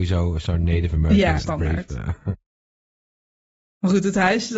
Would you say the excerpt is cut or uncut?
cut